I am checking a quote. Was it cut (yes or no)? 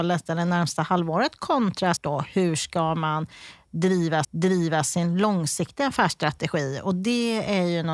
yes